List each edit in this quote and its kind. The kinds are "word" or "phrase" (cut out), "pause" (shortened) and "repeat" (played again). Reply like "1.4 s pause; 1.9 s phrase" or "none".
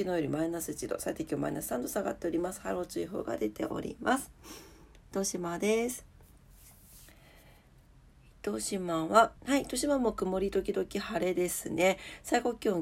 9.4 s pause